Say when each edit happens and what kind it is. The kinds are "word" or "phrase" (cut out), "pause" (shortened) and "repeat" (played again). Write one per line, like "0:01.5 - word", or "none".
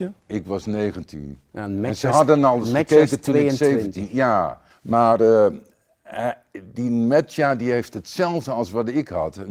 0:04.7 - pause